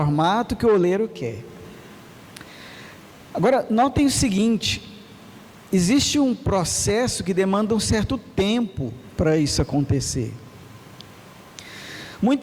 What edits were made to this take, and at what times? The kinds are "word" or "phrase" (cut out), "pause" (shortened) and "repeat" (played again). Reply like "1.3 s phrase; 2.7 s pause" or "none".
none